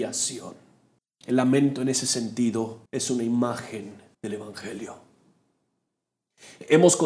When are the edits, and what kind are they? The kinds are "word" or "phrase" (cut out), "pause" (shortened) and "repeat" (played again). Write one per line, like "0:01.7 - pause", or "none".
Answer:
0:01.0 - pause
0:02.9 - pause
0:04.1 - pause